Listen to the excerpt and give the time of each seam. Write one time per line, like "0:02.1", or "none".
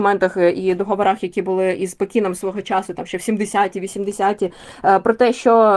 none